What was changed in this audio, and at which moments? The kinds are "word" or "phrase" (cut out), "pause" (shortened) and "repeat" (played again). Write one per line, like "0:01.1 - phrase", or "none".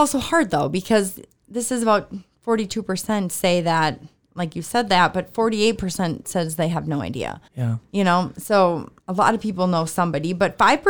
0:07.5 - pause
0:09.0 - pause